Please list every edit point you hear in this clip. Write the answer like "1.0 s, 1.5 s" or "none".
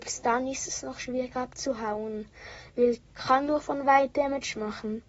3.1 s